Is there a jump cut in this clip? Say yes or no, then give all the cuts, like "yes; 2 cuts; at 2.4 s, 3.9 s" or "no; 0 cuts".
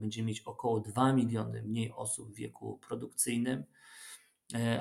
no; 0 cuts